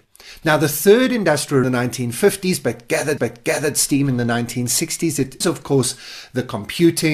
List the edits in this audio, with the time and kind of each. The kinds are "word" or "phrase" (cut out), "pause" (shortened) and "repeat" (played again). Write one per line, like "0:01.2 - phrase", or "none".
0:01.6 - phrase
0:03.2 - repeat
0:05.4 - word